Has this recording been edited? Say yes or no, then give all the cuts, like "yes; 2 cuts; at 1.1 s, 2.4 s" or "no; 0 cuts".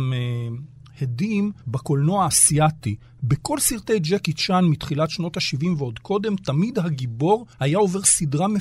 yes; 2 cuts; at 1.6 s, 7.5 s